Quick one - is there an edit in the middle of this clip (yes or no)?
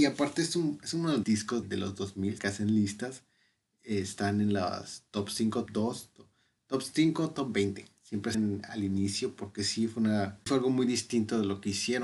yes